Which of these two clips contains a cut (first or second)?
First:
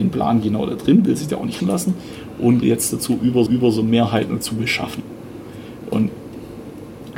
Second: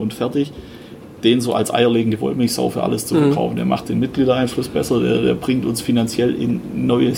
first